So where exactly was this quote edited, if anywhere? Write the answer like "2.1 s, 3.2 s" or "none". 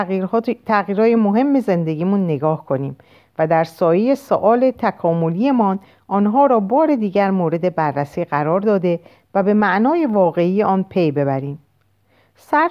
none